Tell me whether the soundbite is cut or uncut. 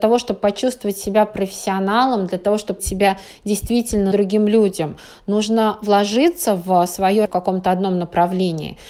cut